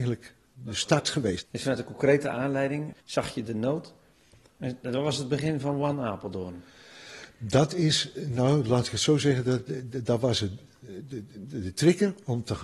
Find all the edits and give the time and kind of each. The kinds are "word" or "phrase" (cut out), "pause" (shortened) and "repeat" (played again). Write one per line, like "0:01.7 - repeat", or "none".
0:03.0 - pause

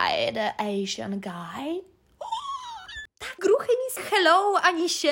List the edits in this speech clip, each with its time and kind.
0:03.4 - word
0:04.0 - phrase

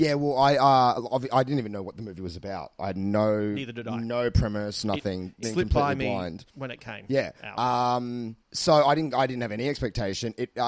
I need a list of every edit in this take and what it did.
0:05.4 - word
0:06.5 - pause
0:08.4 - pause

